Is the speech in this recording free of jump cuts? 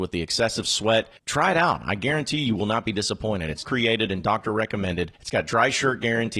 no; 3 cuts; at 1.2 s, 3.6 s, 5.2 s

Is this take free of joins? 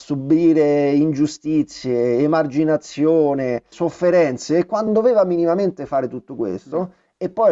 no; 2 cuts; at 3.7 s, 4.9 s

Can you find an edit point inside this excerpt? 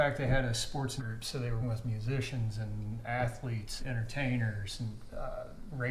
yes; 3 cuts; at 1.0 s, 1.6 s, 3.8 s

